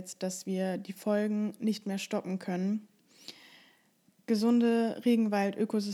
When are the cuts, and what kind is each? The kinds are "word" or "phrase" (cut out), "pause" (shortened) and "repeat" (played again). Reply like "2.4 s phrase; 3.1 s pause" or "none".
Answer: none